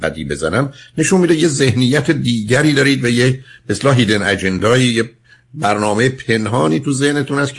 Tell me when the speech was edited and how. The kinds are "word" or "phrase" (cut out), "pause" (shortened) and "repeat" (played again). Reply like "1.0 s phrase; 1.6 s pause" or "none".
none